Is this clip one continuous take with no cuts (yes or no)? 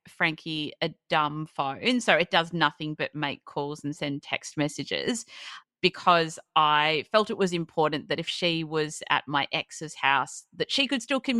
yes